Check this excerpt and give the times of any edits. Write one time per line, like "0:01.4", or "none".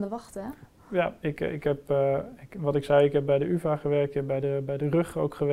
none